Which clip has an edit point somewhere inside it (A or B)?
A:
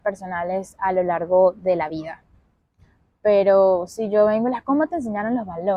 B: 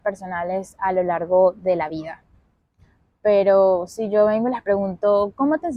A